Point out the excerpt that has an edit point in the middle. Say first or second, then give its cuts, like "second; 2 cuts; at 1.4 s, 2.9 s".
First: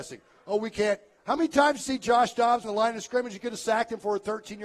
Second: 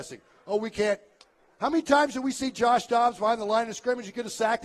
first; 3 cuts; at 1.2 s, 1.8 s, 2.6 s